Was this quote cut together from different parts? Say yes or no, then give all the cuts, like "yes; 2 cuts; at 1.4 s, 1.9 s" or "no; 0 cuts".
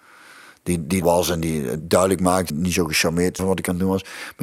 yes; 4 cuts; at 1.0 s, 1.8 s, 2.5 s, 3.4 s